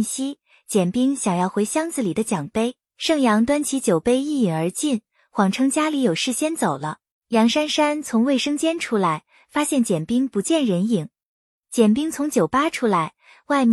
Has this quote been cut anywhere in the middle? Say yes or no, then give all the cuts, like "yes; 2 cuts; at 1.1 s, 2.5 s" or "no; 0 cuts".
yes; 1 cut; at 7.1 s